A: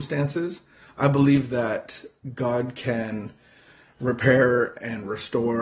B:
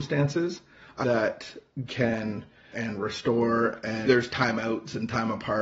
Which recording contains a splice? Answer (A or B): B